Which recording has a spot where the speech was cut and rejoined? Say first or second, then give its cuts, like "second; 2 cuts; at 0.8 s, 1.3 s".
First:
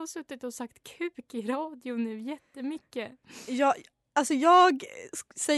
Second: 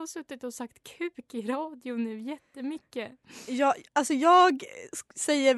second; 1 cut; at 3.9 s